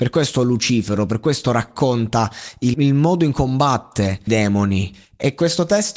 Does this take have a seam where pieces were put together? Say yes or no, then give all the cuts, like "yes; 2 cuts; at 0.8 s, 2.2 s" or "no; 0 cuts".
yes; 3 cuts; at 2.7 s, 3.3 s, 4.3 s